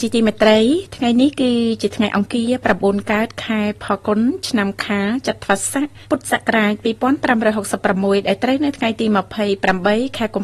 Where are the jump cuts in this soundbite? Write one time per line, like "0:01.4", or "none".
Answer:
0:06.0